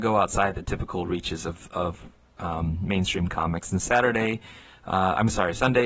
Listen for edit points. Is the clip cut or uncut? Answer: uncut